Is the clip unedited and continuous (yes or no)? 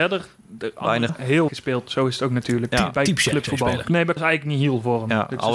no